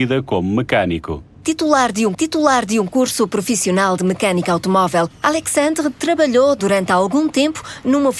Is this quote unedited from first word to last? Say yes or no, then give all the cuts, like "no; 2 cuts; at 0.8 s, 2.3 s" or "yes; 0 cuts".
no; 1 cut; at 2.1 s